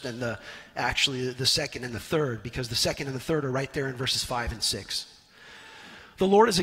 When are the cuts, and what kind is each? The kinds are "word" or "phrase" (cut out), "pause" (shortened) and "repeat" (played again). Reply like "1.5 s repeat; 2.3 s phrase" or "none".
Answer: none